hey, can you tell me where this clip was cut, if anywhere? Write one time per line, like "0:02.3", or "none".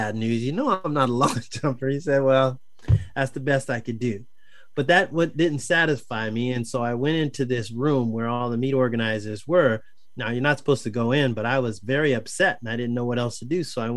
none